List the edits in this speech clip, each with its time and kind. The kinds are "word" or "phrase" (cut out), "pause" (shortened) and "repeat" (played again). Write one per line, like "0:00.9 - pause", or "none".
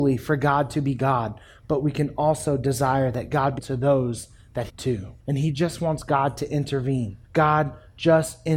0:03.6 - word
0:04.7 - phrase
0:05.2 - pause
0:07.2 - pause